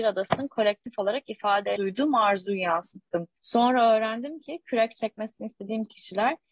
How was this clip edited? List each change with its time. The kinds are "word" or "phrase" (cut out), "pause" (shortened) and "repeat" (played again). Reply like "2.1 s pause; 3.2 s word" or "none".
1.8 s word; 3.4 s pause